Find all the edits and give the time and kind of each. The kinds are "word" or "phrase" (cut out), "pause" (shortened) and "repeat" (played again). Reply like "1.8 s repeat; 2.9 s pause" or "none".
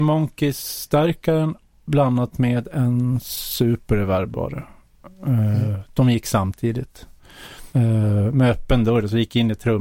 7.7 s pause